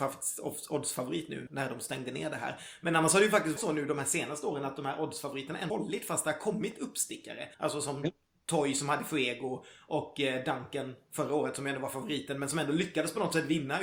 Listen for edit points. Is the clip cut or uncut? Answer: cut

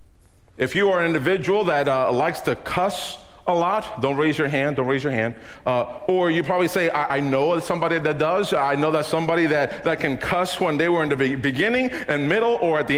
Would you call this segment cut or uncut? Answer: uncut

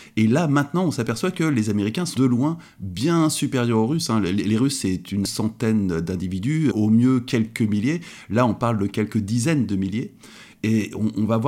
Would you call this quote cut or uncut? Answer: cut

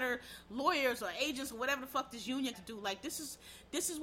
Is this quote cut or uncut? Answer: cut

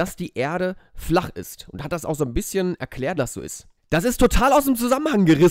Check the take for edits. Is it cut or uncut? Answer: cut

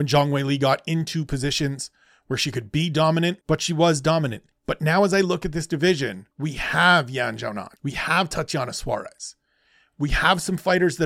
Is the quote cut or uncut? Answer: cut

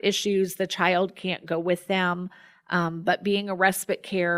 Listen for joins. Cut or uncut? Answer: uncut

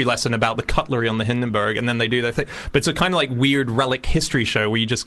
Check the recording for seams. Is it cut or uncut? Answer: uncut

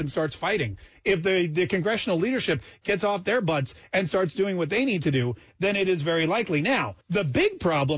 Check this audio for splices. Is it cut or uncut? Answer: cut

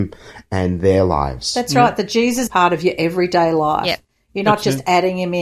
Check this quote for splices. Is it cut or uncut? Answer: cut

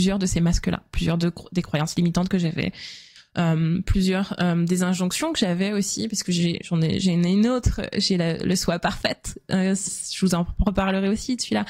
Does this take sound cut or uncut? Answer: cut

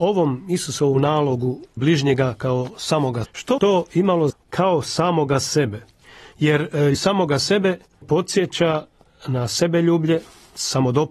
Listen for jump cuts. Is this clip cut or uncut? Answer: cut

